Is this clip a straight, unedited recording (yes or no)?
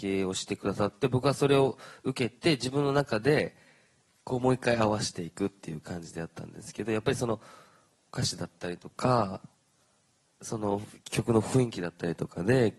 yes